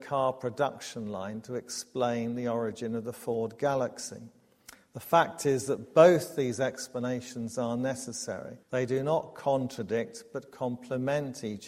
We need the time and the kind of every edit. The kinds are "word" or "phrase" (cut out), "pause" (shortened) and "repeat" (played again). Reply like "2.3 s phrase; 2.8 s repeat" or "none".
8.6 s pause